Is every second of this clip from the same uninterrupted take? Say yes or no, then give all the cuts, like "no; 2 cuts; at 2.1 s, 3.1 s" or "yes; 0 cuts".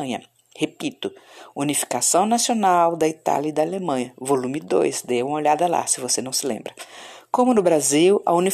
yes; 0 cuts